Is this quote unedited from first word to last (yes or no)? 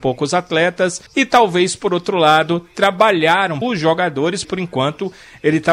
no